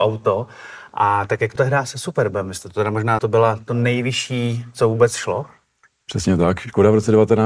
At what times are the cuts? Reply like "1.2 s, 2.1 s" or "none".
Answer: 1.6 s, 3.2 s